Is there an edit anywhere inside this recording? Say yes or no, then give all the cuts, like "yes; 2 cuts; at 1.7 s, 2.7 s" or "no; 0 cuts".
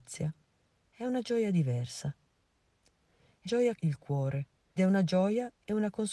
yes; 3 cuts; at 3.5 s, 3.8 s, 4.8 s